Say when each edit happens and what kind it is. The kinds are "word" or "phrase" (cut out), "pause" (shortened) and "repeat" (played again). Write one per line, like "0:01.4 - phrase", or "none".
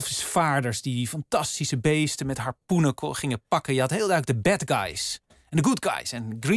none